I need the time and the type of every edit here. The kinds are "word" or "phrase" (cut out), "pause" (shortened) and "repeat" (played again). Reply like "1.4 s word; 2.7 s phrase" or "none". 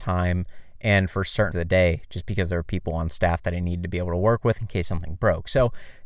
1.5 s word